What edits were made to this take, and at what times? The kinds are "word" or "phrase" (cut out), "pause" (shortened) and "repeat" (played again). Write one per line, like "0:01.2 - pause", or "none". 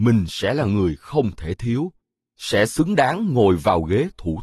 none